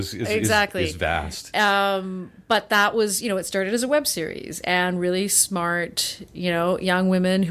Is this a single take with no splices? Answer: yes; 0 cuts

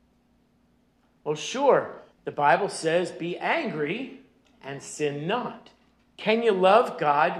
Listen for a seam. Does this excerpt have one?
yes; 3 cuts; at 2.1 s, 4.5 s, 6.0 s

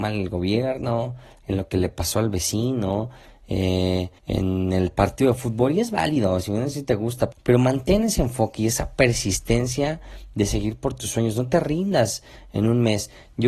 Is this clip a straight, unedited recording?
no; 2 cuts; at 4.2 s, 7.3 s

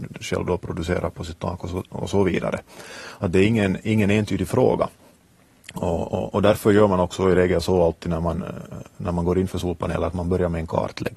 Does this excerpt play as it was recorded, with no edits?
yes; 0 cuts

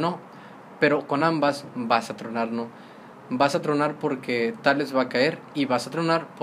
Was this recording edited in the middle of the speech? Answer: no; 0 cuts

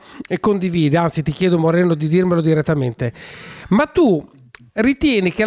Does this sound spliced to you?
no; 0 cuts

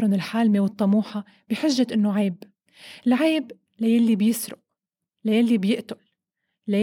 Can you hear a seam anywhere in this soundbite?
no; 0 cuts

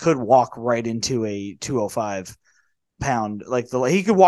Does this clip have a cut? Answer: no; 0 cuts

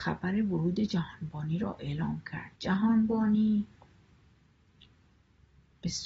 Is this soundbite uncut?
no; 1 cut; at 2.6 s

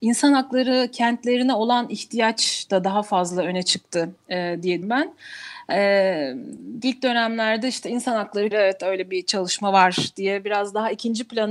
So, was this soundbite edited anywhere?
yes; 3 cuts; at 4.8 s, 6.8 s, 8.5 s

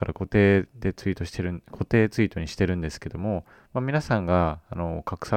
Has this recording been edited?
no; 0 cuts

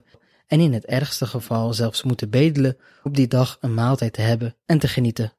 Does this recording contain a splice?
yes; 1 cut; at 3.1 s

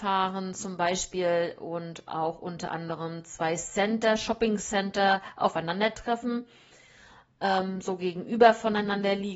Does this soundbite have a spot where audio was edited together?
no; 0 cuts

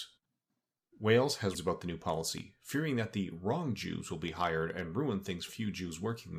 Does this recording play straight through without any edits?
no; 2 cuts; at 1.5 s, 5.5 s

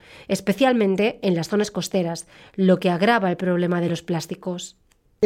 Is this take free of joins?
yes; 0 cuts

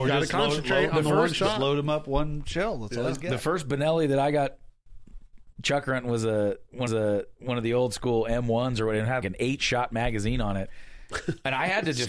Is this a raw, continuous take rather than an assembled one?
no; 3 cuts; at 5.5 s, 6.9 s, 9.2 s

